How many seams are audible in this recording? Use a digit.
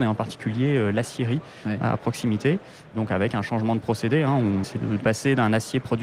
1